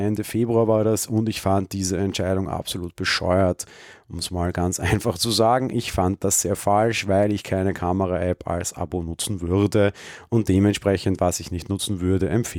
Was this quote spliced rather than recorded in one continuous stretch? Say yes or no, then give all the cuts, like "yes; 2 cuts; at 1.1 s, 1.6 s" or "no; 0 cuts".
no; 0 cuts